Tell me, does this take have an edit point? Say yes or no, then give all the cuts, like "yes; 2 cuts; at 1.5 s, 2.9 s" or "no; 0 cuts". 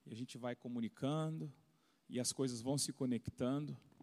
no; 0 cuts